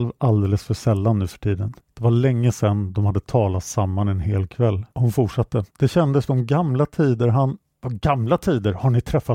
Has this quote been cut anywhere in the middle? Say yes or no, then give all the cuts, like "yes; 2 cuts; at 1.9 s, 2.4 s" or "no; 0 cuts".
yes; 4 cuts; at 1.8 s, 4.9 s, 5.7 s, 6.3 s